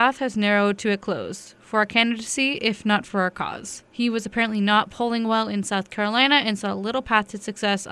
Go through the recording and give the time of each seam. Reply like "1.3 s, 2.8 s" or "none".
3.8 s